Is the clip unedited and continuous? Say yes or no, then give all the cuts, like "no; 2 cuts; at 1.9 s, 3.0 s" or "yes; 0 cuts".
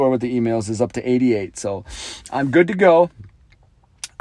yes; 0 cuts